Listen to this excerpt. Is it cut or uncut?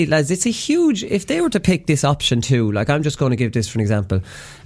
uncut